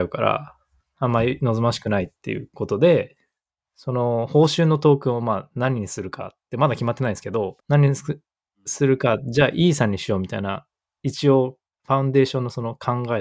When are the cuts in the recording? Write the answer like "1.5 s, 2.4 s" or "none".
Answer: 7.6 s, 11.7 s